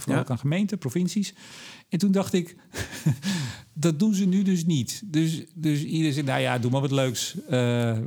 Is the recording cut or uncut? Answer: uncut